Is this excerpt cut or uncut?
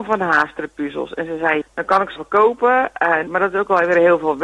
cut